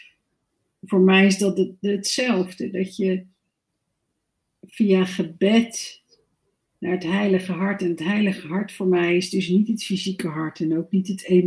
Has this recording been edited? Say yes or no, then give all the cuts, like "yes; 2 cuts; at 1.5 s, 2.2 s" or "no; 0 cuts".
no; 0 cuts